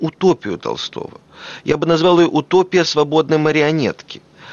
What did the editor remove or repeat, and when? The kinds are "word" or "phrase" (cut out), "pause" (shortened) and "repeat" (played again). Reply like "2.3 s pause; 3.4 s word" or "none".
none

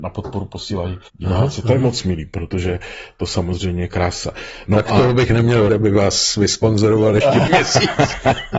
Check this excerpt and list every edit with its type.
1.1 s pause; 5.7 s word; 7.5 s word

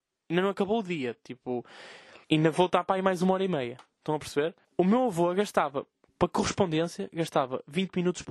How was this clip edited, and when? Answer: 2.2 s pause; 4.6 s pause; 6.0 s pause

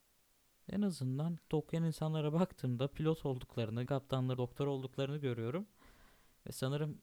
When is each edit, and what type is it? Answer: 1.5 s word; 3.9 s word; 4.4 s word

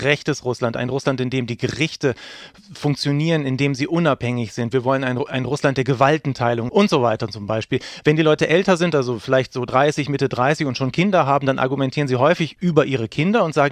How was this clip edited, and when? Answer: none

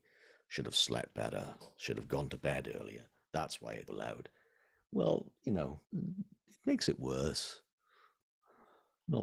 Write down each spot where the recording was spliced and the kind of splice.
3.9 s word; 5.8 s pause

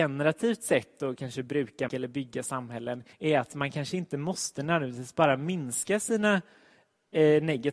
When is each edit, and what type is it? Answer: 1.9 s word; 3.1 s pause

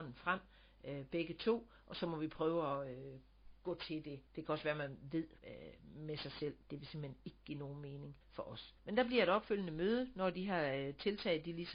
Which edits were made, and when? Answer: 4.3 s pause; 5.4 s pause; 8.2 s pause; 8.8 s pause

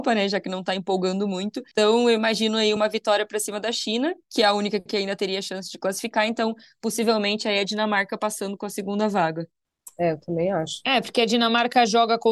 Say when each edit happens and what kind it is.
none

